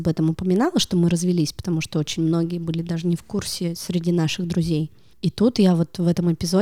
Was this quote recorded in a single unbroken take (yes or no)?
yes